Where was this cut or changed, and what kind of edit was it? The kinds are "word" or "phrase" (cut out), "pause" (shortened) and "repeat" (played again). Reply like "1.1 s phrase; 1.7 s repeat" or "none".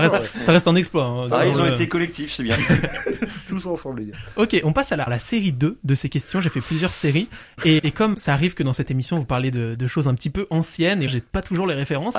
5.1 s word; 7.8 s word; 8.1 s word; 11.1 s word

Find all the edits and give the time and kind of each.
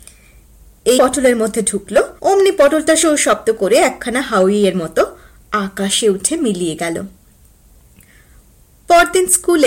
1.0 s phrase; 2.2 s pause; 3.0 s word

